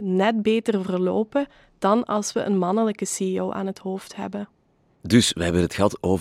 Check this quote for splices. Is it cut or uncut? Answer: uncut